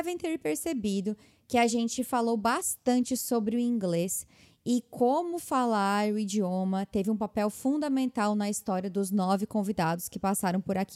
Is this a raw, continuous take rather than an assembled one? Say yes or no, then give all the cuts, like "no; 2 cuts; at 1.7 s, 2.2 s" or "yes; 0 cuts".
yes; 0 cuts